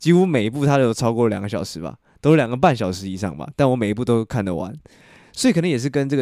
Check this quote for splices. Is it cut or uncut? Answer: uncut